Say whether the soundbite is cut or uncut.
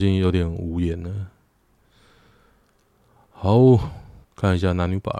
cut